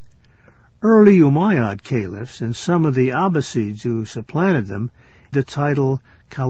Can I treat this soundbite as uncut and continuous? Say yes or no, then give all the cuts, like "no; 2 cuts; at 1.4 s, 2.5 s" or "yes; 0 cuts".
no; 1 cut; at 5.3 s